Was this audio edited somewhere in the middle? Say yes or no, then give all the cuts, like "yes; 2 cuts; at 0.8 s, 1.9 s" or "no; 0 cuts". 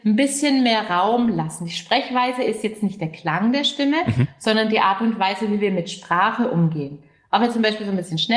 no; 0 cuts